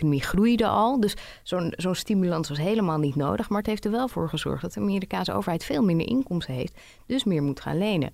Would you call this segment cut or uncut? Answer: uncut